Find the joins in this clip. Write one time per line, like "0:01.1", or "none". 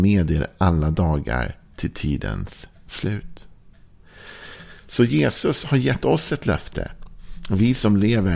none